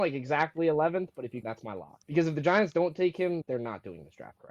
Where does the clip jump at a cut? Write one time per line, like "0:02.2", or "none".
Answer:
0:01.4
0:02.0
0:03.4